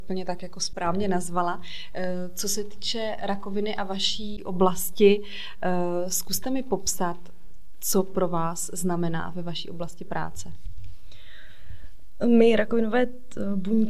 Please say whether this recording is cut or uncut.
uncut